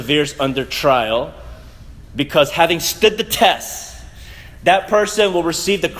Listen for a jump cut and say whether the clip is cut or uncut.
uncut